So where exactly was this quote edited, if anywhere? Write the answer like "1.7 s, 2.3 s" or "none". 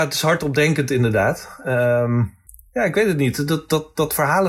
2.5 s